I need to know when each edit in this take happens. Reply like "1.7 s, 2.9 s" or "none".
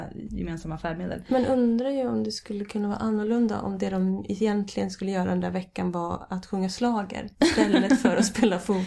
7.3 s